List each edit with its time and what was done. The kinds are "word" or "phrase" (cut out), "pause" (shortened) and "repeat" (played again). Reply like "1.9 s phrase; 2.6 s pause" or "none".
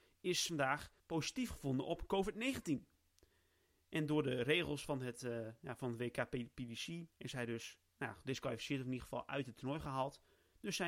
1.0 s pause; 7.1 s pause; 7.9 s pause